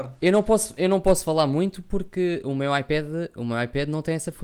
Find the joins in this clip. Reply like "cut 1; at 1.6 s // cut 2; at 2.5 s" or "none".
none